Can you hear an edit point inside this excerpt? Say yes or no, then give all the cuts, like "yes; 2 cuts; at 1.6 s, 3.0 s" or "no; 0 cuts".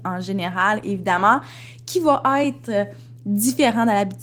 no; 0 cuts